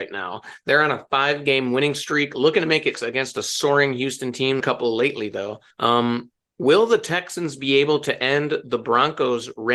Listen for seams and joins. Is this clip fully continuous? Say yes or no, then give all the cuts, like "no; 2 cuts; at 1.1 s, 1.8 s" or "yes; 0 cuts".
no; 3 cuts; at 2.9 s, 4.6 s, 5.7 s